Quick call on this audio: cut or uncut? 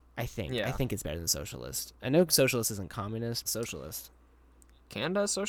cut